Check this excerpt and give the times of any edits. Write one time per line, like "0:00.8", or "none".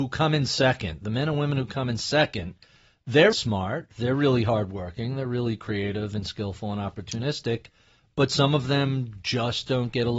0:03.3